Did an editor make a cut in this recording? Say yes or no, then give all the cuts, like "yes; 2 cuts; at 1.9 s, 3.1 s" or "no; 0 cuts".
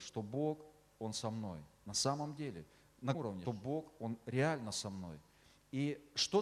yes; 2 cuts; at 3.1 s, 3.5 s